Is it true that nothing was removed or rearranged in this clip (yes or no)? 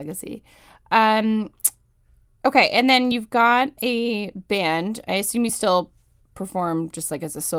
yes